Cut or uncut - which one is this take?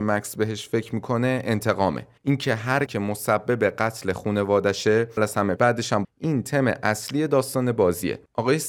cut